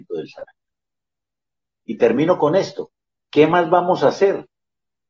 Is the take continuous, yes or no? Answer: yes